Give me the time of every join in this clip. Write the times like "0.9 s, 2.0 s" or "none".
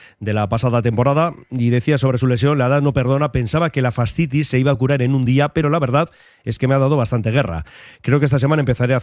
none